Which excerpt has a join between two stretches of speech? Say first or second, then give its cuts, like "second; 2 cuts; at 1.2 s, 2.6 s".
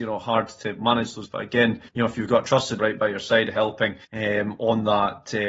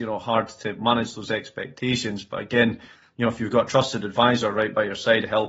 first; 4 cuts; at 1.2 s, 1.9 s, 2.8 s, 4.0 s